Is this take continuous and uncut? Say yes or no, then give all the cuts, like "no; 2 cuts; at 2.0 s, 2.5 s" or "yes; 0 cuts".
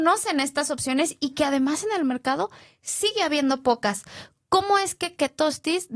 yes; 0 cuts